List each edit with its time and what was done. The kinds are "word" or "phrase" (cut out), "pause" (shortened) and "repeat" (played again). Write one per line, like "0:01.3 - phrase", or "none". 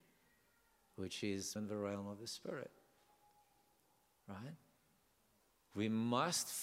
0:01.6 - word
0:05.4 - pause